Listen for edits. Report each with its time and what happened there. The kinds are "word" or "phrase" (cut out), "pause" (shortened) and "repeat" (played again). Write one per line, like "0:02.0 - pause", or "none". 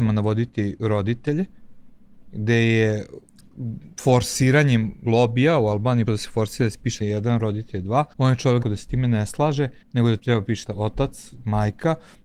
0:05.0 - word
0:06.1 - word
0:07.0 - word
0:08.1 - pause
0:08.6 - word
0:09.8 - pause
0:10.2 - word
0:10.7 - word

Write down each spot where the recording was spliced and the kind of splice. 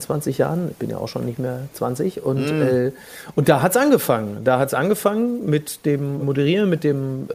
0:06.2 - word

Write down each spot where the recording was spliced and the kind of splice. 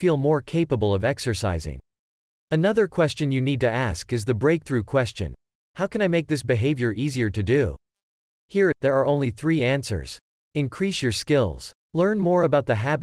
none

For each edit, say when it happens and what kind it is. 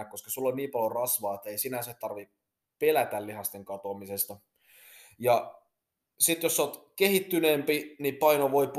none

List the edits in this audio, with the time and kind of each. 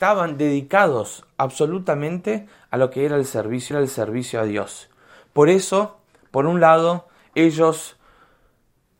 0:03.7 - repeat

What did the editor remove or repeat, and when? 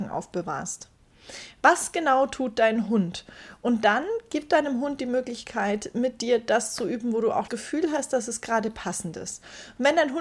0:07.5 - word

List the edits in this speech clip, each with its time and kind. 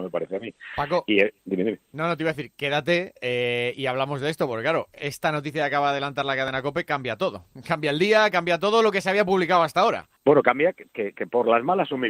0:01.4 - pause
0:03.2 - pause
0:10.2 - pause

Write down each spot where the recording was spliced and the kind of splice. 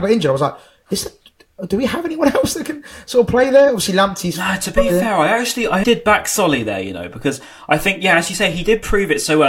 0:05.8 - word

